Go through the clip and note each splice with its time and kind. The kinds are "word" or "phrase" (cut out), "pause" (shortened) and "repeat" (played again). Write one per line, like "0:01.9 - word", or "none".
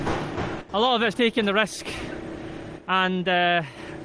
0:01.1 - word